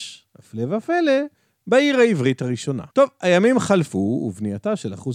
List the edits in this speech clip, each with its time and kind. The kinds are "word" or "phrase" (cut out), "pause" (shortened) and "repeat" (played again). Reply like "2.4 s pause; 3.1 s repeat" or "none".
2.9 s pause